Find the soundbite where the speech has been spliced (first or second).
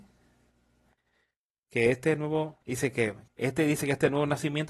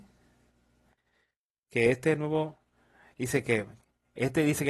first